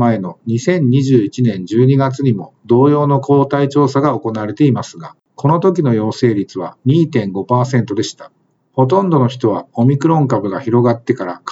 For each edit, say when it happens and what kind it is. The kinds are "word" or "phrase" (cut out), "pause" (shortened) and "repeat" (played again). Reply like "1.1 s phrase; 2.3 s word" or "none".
5.2 s pause; 8.6 s pause